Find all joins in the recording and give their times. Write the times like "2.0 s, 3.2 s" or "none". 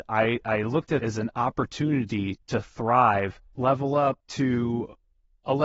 1.0 s, 2.4 s, 3.5 s, 4.2 s